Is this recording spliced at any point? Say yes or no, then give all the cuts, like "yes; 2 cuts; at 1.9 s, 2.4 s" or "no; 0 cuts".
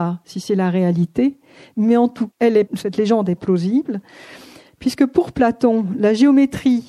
yes; 3 cuts; at 2.3 s, 2.6 s, 3.4 s